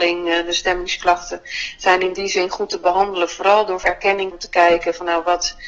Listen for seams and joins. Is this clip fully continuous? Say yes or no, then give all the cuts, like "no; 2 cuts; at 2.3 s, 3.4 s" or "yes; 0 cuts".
no; 2 cuts; at 3.8 s, 4.3 s